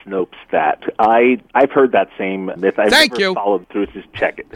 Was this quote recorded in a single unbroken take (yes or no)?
no